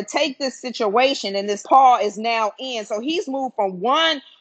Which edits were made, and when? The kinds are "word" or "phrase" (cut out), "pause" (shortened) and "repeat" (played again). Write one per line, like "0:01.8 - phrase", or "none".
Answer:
0:01.6 - phrase